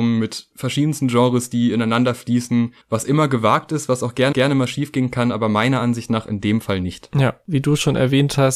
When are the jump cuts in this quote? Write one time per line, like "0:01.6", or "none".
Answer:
0:02.8
0:04.3